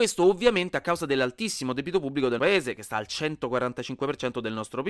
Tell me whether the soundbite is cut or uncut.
cut